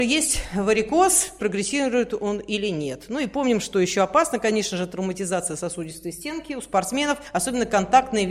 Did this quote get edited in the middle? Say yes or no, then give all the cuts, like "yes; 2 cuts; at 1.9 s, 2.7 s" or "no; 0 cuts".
yes; 1 cut; at 1.4 s